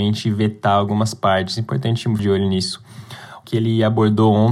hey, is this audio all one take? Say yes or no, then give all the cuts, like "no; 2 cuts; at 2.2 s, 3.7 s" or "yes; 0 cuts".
no; 2 cuts; at 2.2 s, 3.4 s